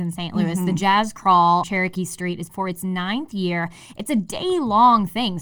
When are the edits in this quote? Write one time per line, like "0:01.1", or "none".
0:01.6
0:02.5